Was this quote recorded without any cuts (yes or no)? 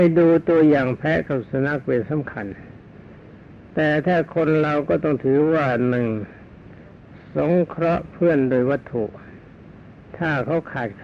yes